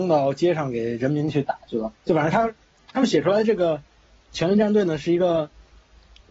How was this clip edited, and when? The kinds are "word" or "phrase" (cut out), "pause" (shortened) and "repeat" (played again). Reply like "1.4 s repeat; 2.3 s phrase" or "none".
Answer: 4.3 s word